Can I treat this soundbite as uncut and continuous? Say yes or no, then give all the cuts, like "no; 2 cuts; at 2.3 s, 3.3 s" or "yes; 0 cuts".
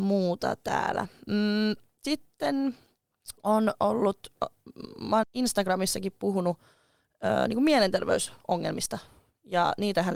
no; 3 cuts; at 3.4 s, 4.4 s, 5.2 s